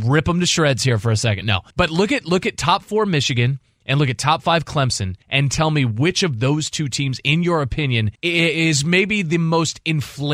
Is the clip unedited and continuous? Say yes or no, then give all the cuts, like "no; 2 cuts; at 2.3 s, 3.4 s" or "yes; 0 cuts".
no; 3 cuts; at 1.7 s, 5.2 s, 8.1 s